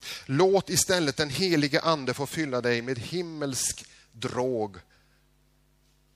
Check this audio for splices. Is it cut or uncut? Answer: uncut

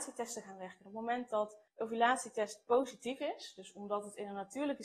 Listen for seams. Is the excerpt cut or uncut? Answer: cut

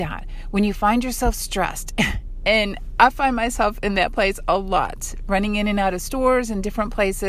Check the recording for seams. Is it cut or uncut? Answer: uncut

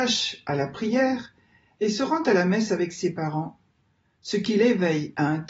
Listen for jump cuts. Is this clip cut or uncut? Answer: uncut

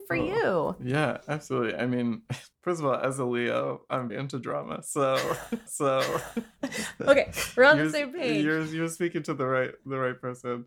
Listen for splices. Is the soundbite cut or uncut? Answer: cut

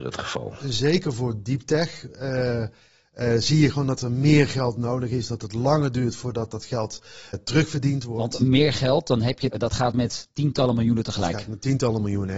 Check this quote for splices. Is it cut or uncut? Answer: cut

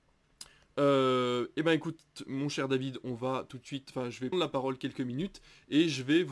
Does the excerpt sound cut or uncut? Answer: cut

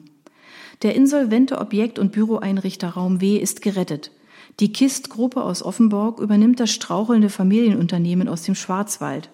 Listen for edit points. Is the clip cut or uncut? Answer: uncut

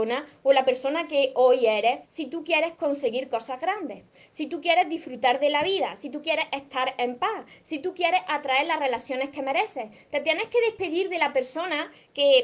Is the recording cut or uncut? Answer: cut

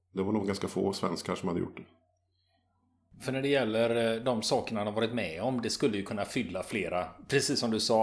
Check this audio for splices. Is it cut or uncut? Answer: uncut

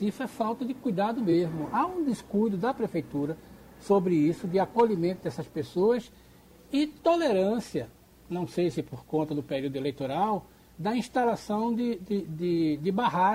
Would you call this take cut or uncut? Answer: uncut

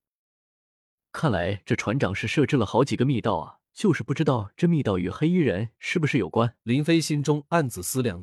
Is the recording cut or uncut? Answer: cut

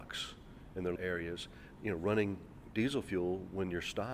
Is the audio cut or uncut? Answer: cut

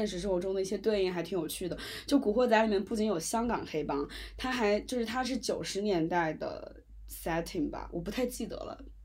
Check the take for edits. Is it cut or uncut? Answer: uncut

